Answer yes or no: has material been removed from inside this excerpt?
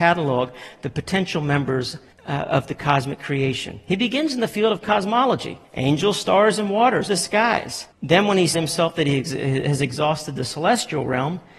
yes